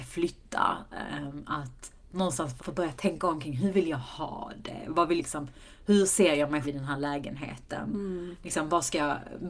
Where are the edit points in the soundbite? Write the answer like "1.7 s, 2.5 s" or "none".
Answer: 2.6 s, 5.2 s, 6.6 s